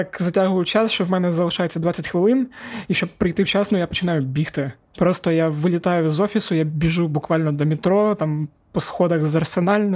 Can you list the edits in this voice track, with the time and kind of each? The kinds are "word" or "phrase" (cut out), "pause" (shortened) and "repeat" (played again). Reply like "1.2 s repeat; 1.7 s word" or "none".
none